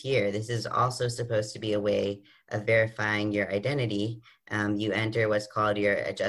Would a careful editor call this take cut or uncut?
uncut